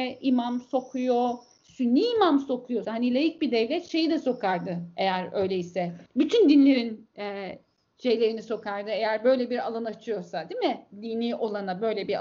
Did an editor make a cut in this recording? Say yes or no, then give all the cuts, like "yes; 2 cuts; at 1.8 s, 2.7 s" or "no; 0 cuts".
yes; 3 cuts; at 2.8 s, 6.1 s, 10.9 s